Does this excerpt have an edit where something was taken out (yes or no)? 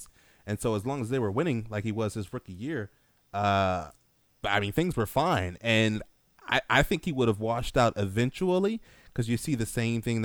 no